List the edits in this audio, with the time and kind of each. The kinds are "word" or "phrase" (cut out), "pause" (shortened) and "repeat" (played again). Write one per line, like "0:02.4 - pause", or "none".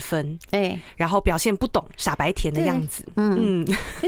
none